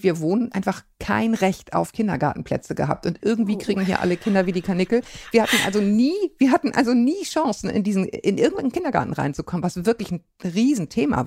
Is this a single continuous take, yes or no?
yes